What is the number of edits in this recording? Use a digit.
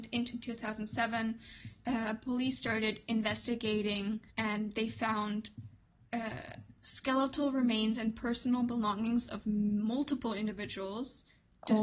2